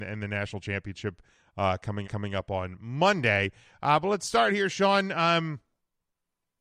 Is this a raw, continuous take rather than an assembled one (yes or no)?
no